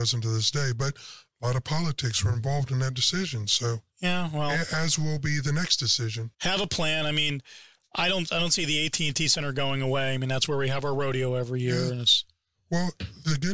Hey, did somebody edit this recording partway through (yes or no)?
yes